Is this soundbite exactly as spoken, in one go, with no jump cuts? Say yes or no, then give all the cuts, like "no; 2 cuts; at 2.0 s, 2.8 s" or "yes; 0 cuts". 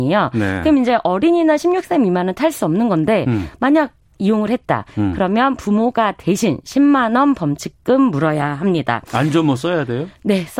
yes; 0 cuts